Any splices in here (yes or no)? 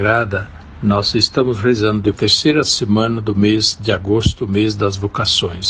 yes